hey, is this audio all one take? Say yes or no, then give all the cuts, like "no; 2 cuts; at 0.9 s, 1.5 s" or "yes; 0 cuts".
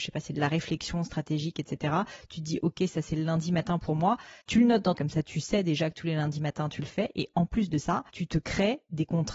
no; 3 cuts; at 4.4 s, 5.0 s, 8.1 s